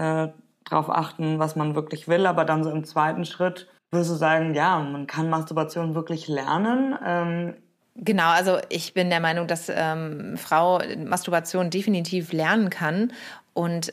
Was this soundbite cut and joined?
yes; 1 cut; at 3.8 s

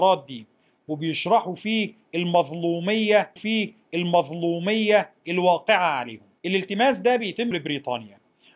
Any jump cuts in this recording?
yes; 3 cuts; at 3.4 s, 6.4 s, 7.5 s

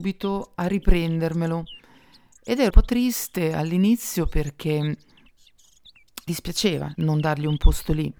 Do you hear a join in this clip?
yes; 3 cuts; at 2.7 s, 6.3 s, 6.9 s

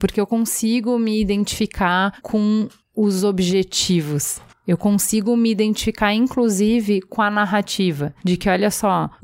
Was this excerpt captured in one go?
yes; 0 cuts

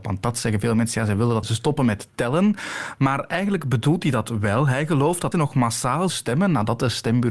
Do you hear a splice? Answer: yes; 3 cuts; at 1.4 s, 5.3 s, 6.1 s

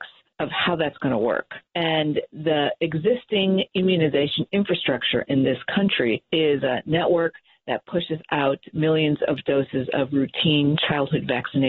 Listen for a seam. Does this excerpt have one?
no; 0 cuts

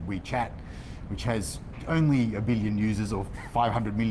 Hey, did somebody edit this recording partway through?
no; 0 cuts

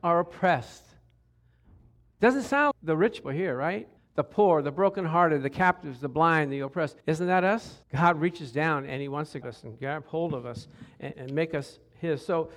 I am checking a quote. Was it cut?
yes; 7 cuts; at 2.7 s, 3.2 s, 4.0 s, 7.0 s, 7.8 s, 9.4 s, 11.1 s

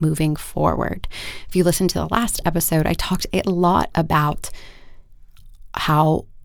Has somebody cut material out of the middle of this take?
no; 0 cuts

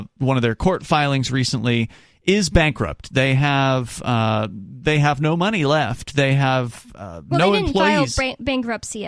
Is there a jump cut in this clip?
no; 0 cuts

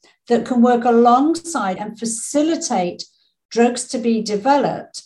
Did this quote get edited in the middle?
yes; 1 cut; at 1.8 s

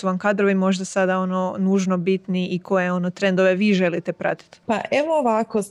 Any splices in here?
yes; 1 cut; at 4.6 s

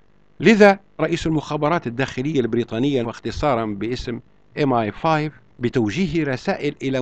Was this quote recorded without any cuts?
no; 2 cuts; at 1.0 s, 3.0 s

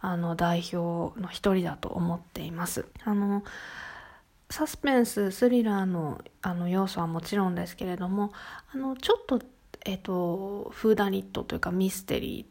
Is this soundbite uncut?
no; 3 cuts; at 2.9 s, 4.2 s, 6.3 s

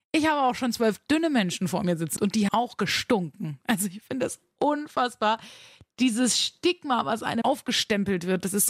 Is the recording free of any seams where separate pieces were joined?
no; 3 cuts; at 2.2 s, 2.5 s, 7.4 s

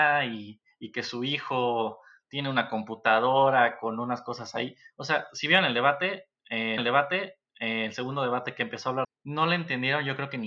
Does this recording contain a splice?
yes; 2 cuts; at 6.8 s, 9.0 s

